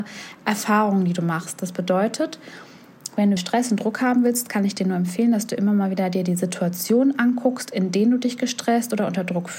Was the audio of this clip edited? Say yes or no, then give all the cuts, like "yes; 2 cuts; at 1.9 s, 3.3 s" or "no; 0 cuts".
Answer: yes; 1 cut; at 3.4 s